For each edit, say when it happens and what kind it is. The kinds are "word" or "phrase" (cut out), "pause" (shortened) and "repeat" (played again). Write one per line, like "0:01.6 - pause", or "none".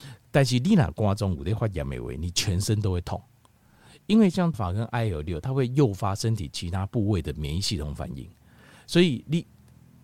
0:04.5 - phrase